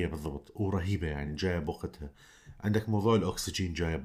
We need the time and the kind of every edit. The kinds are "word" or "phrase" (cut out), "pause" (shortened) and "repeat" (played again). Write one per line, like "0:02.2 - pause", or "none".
none